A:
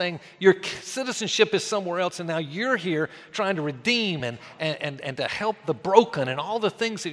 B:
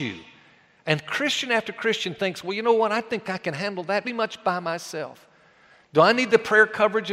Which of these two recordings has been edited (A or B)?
B